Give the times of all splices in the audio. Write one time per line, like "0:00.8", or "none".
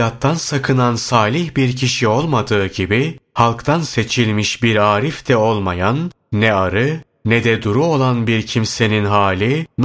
none